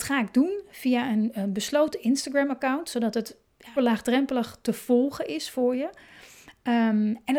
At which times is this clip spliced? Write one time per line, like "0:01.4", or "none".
0:03.8